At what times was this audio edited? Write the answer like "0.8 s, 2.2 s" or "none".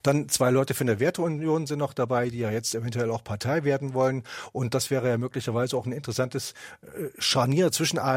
none